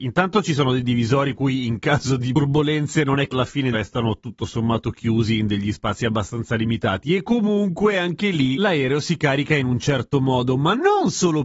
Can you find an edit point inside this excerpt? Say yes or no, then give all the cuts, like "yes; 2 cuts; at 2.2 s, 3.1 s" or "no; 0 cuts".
yes; 3 cuts; at 1.3 s, 3.3 s, 3.7 s